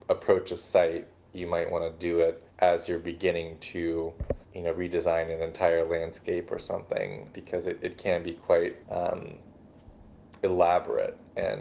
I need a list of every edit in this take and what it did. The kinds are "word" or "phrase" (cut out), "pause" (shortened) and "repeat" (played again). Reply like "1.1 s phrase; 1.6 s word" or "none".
2.5 s pause; 4.4 s pause; 7.3 s word; 8.8 s pause